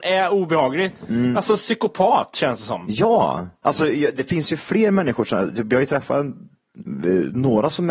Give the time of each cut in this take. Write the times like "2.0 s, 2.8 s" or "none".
none